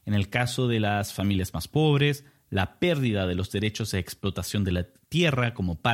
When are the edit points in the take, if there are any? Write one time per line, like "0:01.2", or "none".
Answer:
none

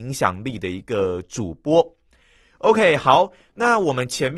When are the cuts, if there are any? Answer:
none

